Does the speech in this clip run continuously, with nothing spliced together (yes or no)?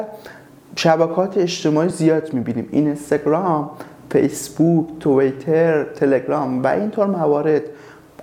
yes